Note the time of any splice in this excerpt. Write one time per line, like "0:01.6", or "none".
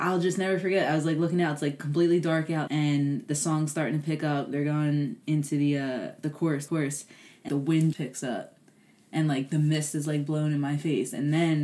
0:02.7
0:06.7
0:07.5
0:07.9